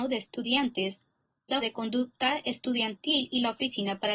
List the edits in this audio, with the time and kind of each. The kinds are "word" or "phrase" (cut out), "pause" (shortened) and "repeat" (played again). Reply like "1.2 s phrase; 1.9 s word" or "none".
1.6 s word